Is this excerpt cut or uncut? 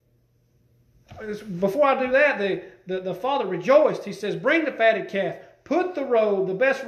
uncut